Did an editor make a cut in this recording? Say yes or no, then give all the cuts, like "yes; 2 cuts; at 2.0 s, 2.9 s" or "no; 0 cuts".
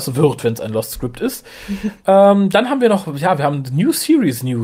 no; 0 cuts